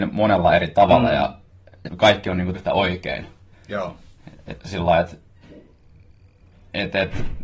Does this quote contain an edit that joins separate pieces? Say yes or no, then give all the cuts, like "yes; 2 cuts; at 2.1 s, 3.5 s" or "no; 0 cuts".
yes; 4 cuts; at 1.9 s, 2.5 s, 3.5 s, 4.6 s